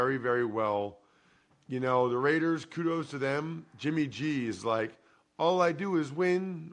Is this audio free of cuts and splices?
yes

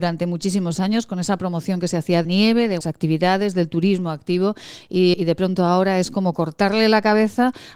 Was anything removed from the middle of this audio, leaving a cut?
yes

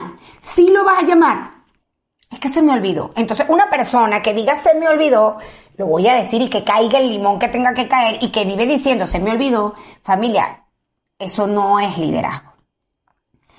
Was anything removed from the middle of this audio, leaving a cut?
no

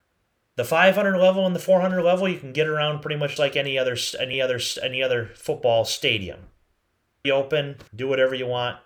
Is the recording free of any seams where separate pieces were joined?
no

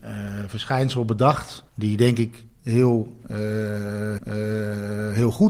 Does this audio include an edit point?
yes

